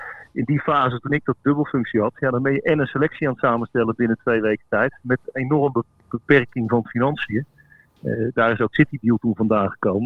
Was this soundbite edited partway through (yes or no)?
yes